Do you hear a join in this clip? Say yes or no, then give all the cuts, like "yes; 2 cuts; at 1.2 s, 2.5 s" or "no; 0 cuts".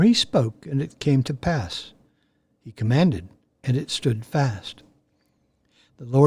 no; 0 cuts